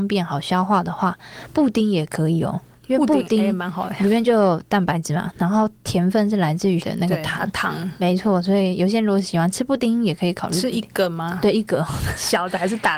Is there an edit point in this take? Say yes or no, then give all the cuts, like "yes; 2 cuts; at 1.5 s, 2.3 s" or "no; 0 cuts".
yes; 1 cut; at 6.8 s